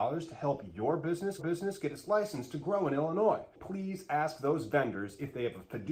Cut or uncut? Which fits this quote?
cut